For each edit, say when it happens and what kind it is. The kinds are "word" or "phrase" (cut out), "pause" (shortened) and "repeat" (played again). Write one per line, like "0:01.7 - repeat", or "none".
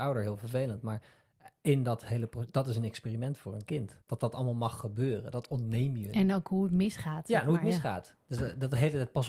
0:04.0 - pause